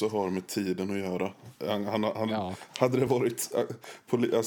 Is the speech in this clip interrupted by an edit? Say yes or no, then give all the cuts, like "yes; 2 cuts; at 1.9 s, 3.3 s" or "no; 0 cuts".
no; 0 cuts